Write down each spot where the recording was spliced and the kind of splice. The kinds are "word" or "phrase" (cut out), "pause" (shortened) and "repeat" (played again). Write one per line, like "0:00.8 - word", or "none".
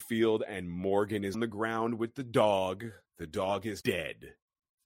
0:01.3 - word
0:03.1 - pause
0:03.8 - word

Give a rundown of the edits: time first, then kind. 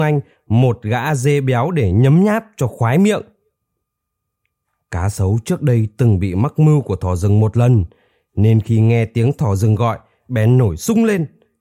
none

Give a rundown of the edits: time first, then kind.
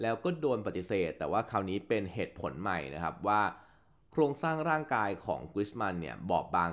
none

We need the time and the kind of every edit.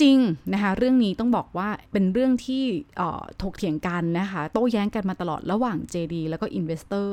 0:01.9 - pause

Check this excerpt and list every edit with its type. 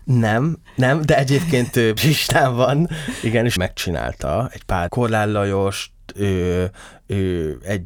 0:02.0 - word
0:03.6 - phrase
0:04.9 - phrase

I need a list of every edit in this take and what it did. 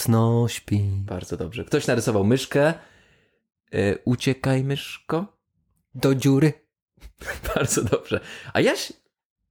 none

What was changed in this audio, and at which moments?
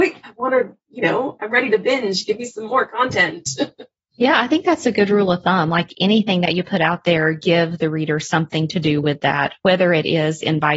none

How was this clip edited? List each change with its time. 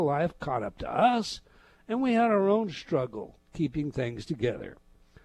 none

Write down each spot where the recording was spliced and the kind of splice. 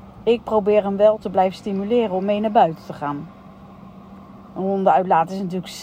none

